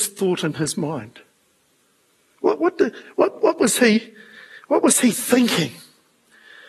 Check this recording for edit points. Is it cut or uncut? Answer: uncut